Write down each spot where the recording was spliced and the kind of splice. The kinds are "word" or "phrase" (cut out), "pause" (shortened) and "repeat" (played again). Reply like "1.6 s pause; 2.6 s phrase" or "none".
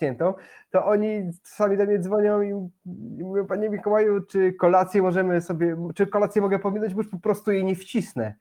none